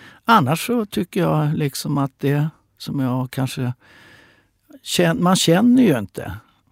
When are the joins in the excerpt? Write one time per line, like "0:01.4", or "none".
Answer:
none